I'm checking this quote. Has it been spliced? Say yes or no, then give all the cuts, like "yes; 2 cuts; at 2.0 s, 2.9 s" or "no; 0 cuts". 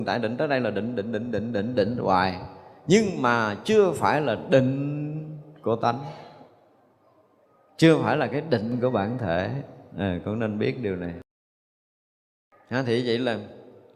no; 0 cuts